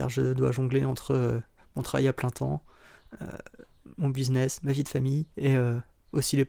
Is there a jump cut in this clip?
yes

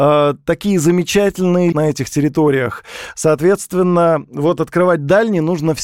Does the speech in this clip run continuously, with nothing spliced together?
no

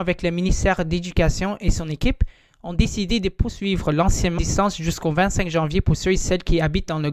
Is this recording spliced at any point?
yes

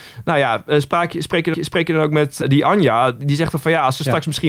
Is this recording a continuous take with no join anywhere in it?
no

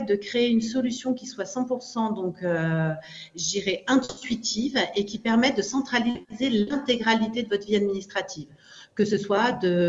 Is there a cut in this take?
no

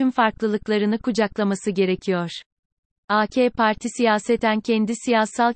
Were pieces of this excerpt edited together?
no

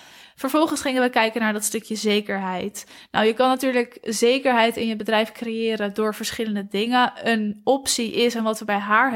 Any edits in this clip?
no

